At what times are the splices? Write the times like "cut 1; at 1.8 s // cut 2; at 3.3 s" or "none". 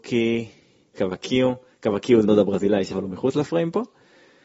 cut 1; at 0.9 s // cut 2; at 2.2 s // cut 3; at 2.9 s